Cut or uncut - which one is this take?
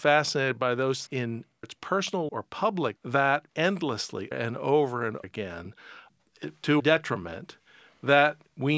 cut